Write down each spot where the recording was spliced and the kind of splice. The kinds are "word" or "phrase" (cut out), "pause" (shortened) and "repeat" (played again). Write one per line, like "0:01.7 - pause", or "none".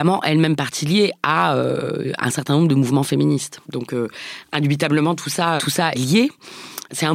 0:03.6 - pause
0:05.6 - word
0:05.9 - word